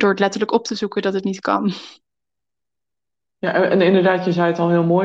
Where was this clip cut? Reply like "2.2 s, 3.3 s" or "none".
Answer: none